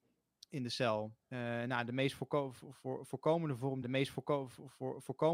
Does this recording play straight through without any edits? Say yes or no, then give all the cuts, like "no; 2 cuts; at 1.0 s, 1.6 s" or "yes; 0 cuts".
no; 2 cuts; at 1.2 s, 3.8 s